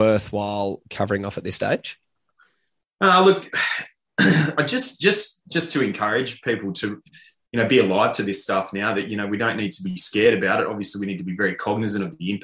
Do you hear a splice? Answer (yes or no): no